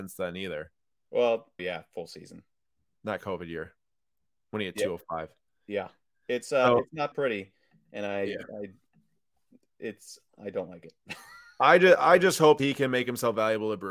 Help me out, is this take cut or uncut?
cut